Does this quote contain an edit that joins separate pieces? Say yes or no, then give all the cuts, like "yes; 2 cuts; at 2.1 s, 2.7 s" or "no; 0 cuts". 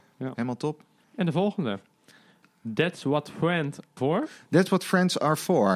yes; 2 cuts; at 1.0 s, 4.0 s